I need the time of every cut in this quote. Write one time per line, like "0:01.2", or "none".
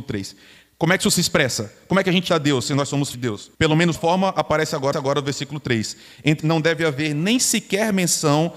0:02.3
0:03.1
0:03.5
0:03.9
0:04.9
0:06.4

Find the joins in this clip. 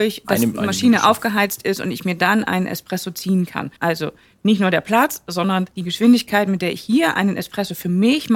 0:03.8

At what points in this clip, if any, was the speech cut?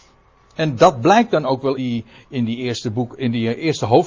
0:01.8

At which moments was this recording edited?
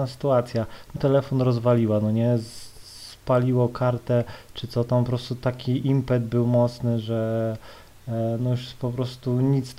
0:01.0

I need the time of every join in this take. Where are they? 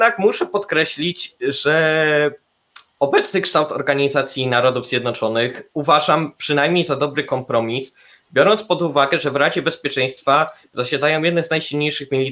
none

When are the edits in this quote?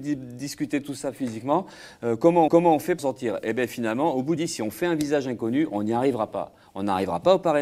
0:02.5
0:03.0
0:04.4

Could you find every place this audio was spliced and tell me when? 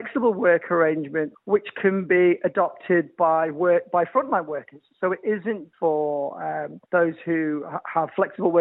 0:01.3
0:05.7
0:06.8

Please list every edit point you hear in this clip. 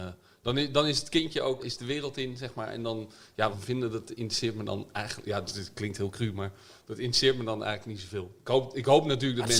0:01.6
0:03.5

